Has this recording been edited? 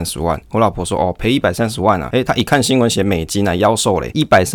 no; 0 cuts

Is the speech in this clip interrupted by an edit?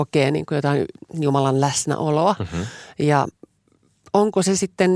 no; 0 cuts

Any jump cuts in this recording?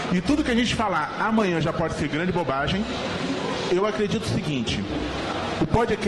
no; 0 cuts

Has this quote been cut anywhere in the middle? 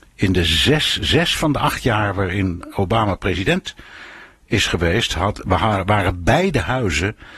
no; 0 cuts

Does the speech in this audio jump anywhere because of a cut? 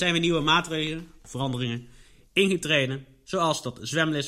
no; 0 cuts

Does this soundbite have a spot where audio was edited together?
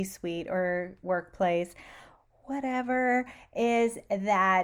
no; 0 cuts

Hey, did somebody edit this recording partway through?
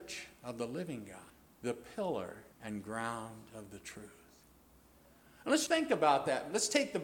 yes; 3 cuts; at 1.3 s, 2.5 s, 5.7 s

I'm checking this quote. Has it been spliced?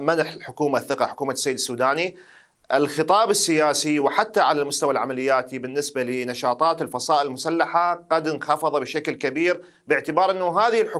no; 0 cuts

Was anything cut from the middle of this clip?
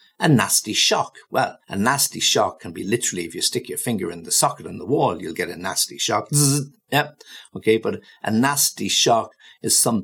yes; 1 cut; at 1.6 s

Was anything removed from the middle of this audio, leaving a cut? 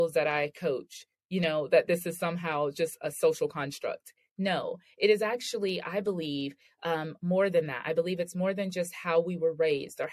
no; 0 cuts

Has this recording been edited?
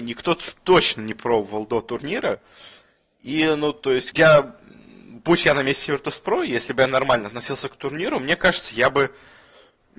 yes; 1 cut; at 4.1 s

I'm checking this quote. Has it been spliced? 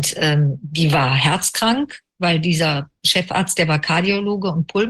no; 0 cuts

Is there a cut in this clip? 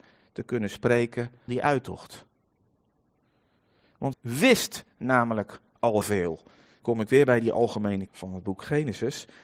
yes; 5 cuts; at 1.5 s, 4.1 s, 6.0 s, 6.8 s, 8.1 s

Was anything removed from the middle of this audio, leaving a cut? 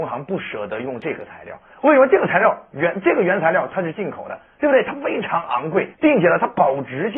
yes; 1 cut; at 5.9 s

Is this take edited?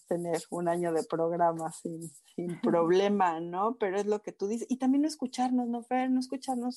no; 0 cuts

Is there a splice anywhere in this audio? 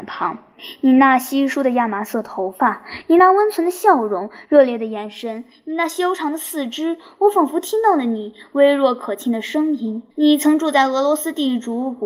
yes; 1 cut; at 10.1 s

